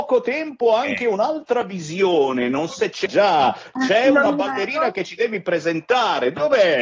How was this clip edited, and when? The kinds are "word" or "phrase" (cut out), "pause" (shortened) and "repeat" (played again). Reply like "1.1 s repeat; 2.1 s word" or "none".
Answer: 2.7 s word; 3.1 s word

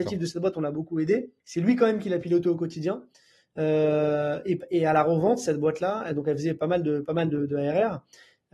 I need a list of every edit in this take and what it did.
1.4 s pause

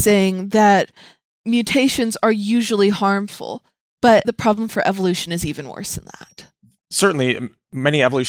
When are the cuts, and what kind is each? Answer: 4.2 s word

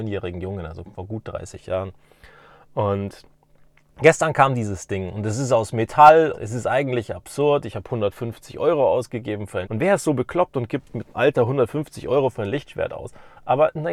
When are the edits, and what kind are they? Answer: 6.3 s word; 9.6 s word; 11.1 s word

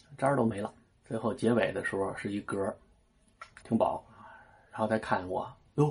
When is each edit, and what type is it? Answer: 3.6 s word

